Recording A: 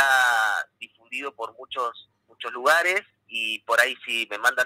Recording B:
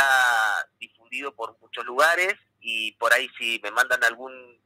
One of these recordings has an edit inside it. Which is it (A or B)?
B